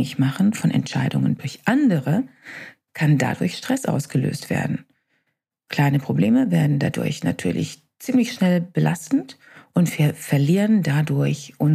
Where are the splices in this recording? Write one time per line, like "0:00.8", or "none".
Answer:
none